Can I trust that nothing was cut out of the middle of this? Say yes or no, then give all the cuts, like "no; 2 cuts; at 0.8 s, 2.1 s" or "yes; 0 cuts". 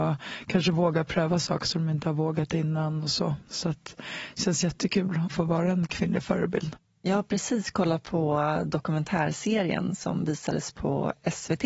yes; 0 cuts